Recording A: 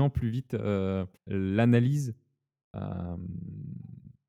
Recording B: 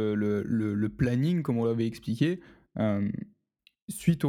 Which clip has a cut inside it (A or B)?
A